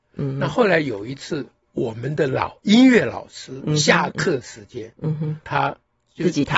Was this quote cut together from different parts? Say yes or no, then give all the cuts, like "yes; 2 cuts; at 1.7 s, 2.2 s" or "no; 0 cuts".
yes; 1 cut; at 5.4 s